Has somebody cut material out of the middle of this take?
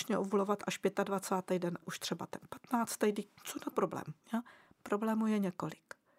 yes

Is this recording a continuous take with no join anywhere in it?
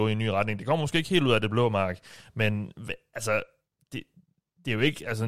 yes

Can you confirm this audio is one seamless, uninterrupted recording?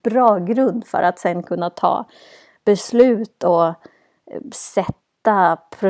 yes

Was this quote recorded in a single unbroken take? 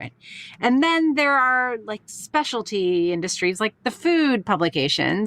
yes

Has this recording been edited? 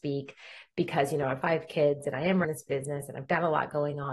yes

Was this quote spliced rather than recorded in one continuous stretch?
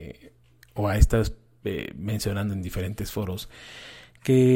no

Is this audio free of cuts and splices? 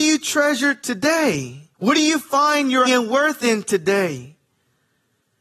no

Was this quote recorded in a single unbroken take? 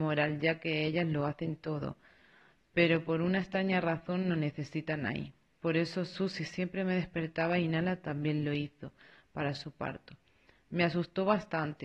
yes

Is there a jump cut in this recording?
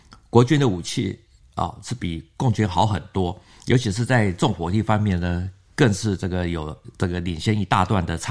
no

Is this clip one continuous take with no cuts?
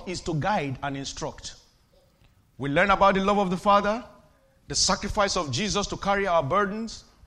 yes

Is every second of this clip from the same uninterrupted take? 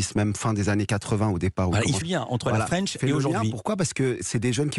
no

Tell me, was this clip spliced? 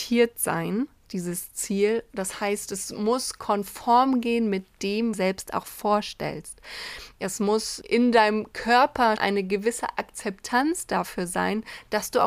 yes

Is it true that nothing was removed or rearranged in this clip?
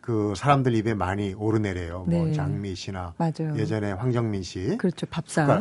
yes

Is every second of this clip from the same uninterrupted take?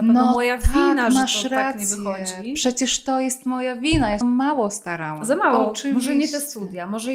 no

